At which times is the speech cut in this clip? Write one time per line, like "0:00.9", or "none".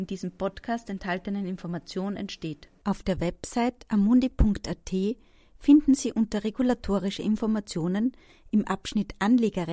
none